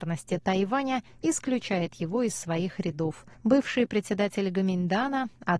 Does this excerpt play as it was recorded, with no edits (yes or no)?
no